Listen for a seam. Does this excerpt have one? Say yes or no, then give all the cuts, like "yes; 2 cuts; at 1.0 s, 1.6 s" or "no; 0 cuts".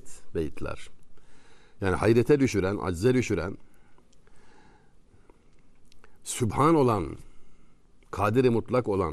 no; 0 cuts